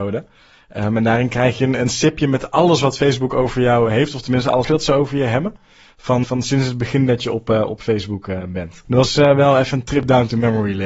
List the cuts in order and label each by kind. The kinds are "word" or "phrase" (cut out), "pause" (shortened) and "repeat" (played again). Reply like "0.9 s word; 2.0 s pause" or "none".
4.6 s phrase; 6.2 s word